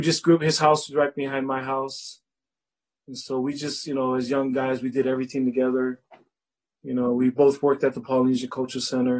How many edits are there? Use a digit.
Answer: 0